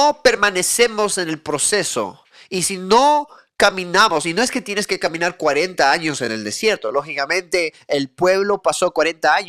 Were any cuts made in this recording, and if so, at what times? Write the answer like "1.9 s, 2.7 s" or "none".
none